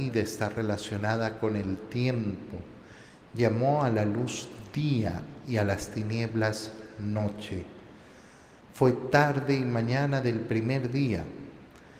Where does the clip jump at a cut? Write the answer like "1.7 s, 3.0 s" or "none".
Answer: none